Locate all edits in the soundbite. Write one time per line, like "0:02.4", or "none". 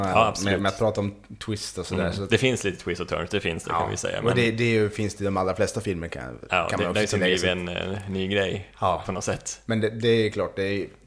none